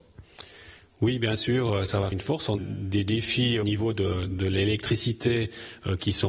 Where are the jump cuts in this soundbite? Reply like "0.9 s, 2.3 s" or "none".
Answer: 2.1 s, 2.6 s, 3.6 s

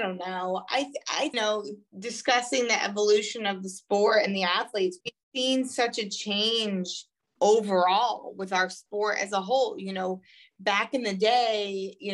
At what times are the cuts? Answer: 1.3 s, 5.0 s

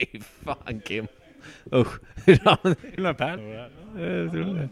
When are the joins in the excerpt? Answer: 3.0 s, 3.4 s

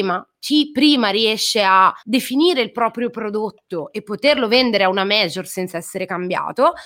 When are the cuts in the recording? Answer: 2.0 s

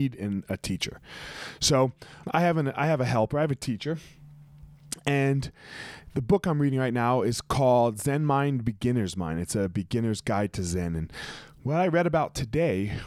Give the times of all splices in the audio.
2.2 s

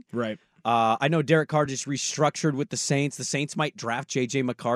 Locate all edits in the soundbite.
none

